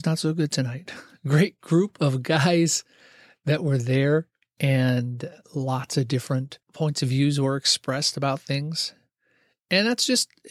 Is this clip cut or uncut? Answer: cut